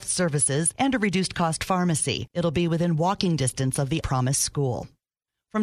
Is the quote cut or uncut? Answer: cut